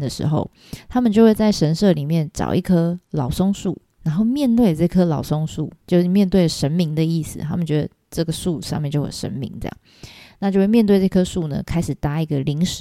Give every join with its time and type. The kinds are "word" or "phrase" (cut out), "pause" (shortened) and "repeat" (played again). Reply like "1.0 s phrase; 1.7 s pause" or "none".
5.8 s pause